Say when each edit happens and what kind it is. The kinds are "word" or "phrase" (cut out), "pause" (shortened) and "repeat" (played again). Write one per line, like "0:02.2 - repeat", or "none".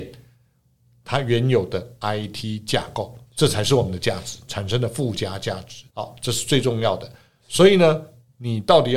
0:03.3 - pause
0:05.9 - pause